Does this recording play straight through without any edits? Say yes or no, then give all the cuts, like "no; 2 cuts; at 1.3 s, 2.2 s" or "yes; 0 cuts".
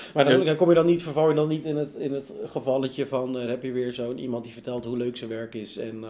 yes; 0 cuts